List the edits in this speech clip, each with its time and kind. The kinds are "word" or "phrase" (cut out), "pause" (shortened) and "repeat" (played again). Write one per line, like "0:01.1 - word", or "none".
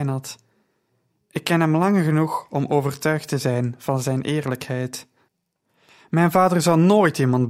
none